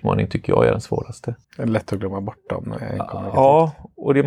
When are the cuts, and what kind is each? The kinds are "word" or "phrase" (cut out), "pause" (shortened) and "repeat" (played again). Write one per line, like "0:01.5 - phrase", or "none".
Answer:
0:01.4 - pause